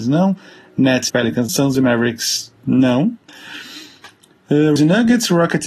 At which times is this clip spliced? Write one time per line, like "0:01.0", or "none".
0:01.1
0:01.5
0:02.6
0:04.8